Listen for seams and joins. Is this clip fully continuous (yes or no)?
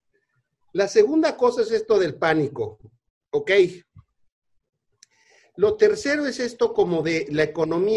yes